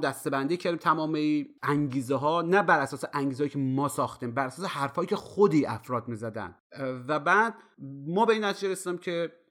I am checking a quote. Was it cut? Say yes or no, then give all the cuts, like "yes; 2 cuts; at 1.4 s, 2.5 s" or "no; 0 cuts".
no; 0 cuts